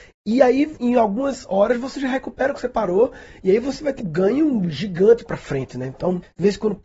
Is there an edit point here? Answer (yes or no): yes